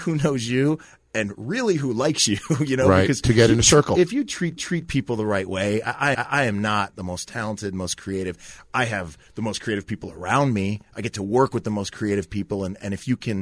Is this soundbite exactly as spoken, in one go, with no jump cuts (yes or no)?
no